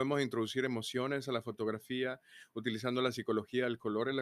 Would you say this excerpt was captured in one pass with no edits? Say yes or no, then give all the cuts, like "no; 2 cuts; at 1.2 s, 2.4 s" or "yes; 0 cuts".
yes; 0 cuts